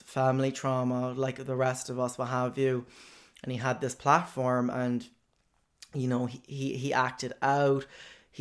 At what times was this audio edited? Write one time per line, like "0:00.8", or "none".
none